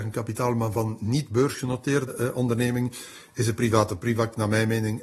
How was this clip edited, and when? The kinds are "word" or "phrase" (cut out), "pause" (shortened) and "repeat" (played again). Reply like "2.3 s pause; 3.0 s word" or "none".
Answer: 2.1 s word